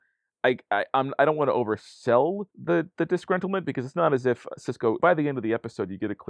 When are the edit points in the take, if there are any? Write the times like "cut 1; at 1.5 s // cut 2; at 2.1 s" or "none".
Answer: cut 1; at 2.5 s // cut 2; at 5.0 s